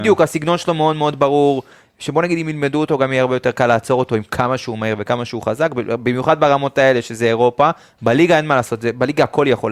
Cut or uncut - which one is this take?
uncut